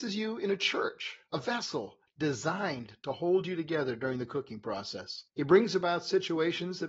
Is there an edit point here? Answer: yes; 2 cuts; at 1.3 s, 5.3 s

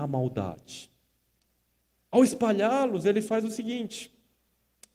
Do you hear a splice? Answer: no; 0 cuts

